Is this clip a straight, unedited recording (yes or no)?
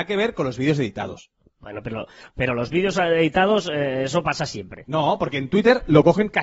yes